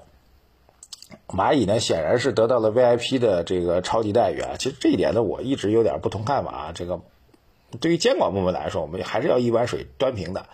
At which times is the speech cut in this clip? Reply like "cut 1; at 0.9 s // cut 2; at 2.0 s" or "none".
none